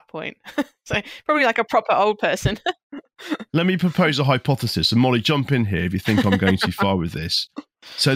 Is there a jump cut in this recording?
no; 0 cuts

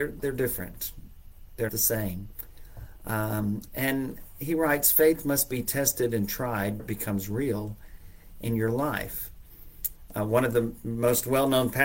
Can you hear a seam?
yes; 2 cuts; at 1.7 s, 6.8 s

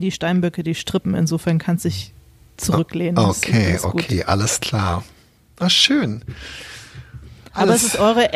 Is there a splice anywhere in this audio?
no; 0 cuts

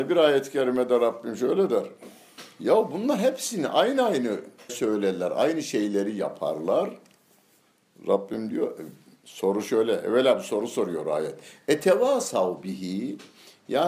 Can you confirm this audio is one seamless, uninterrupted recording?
no; 1 cut; at 4.7 s

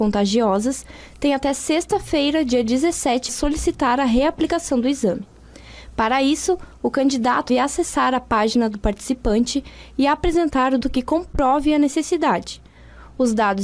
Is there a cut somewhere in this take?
yes; 3 cuts; at 3.3 s, 7.5 s, 10.8 s

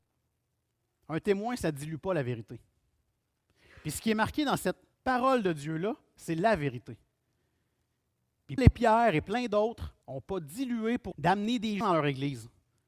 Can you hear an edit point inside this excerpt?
yes; 5 cuts; at 4.9 s, 8.6 s, 10.0 s, 11.1 s, 11.8 s

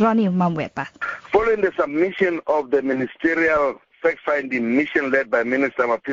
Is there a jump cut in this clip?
no; 0 cuts

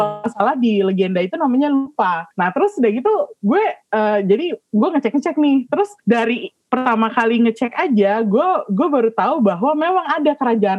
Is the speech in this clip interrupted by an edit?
yes; 2 cuts; at 2.3 s, 6.0 s

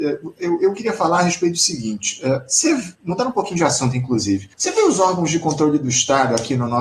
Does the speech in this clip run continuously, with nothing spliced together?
no; 2 cuts; at 2.9 s, 4.5 s

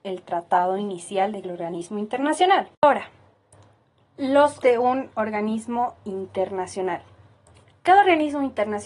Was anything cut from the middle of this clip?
yes; 3 cuts; at 1.4 s, 2.7 s, 4.6 s

